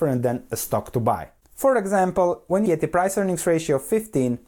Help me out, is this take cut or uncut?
cut